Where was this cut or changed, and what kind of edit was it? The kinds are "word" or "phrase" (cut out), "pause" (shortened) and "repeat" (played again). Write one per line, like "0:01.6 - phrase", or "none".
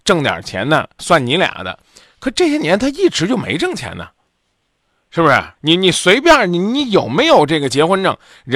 0:01.0 - word
0:05.6 - pause